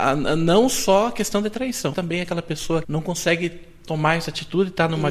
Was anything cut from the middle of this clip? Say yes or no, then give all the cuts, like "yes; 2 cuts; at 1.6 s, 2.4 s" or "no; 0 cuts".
yes; 2 cuts; at 1.9 s, 2.8 s